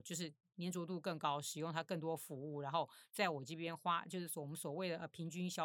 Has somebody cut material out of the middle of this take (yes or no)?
no